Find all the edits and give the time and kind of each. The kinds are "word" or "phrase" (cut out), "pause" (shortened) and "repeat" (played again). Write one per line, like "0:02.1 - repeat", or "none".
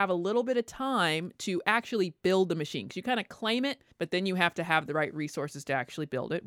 0:03.9 - pause